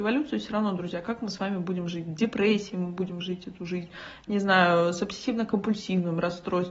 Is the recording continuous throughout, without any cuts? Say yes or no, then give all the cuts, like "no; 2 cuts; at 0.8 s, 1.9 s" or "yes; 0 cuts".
yes; 0 cuts